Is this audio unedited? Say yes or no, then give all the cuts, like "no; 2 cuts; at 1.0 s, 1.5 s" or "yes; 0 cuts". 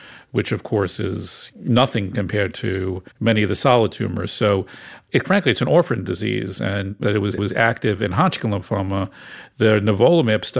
no; 5 cuts; at 1.5 s, 3.1 s, 5.2 s, 7.0 s, 7.4 s